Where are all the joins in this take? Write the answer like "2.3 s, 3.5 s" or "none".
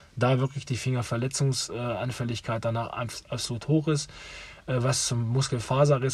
1.1 s